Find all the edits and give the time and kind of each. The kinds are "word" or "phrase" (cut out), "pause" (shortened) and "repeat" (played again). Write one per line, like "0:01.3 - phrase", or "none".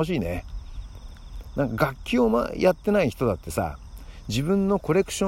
none